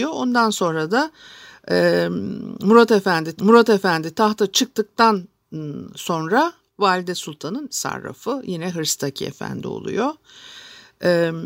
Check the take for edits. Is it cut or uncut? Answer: cut